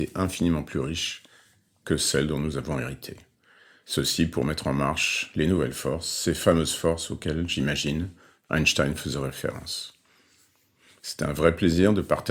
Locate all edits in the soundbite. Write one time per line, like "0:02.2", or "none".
none